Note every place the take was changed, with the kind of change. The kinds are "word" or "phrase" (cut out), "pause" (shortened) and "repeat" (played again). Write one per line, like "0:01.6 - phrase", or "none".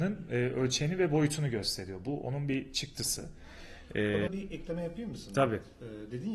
0:04.3 - word